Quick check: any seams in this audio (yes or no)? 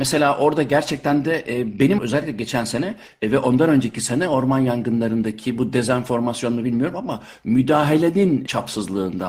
yes